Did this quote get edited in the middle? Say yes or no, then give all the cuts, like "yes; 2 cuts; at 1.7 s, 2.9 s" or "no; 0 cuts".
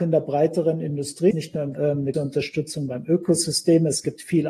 yes; 3 cuts; at 1.3 s, 1.7 s, 2.1 s